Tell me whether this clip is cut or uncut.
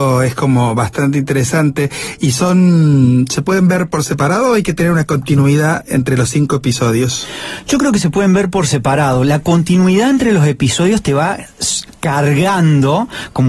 uncut